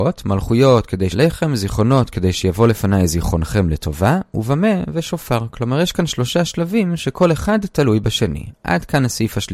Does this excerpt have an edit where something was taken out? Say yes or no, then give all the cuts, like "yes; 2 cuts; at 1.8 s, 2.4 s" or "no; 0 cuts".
yes; 1 cut; at 1.1 s